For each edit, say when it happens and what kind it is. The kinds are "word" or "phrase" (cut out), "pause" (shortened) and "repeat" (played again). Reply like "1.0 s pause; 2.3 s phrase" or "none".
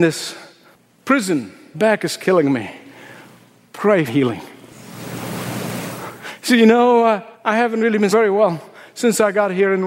1.7 s word; 4.1 s phrase; 7.3 s pause; 8.1 s word